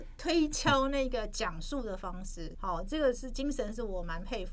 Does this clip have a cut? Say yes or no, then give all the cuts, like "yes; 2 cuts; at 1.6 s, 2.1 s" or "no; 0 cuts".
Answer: yes; 1 cut; at 2.5 s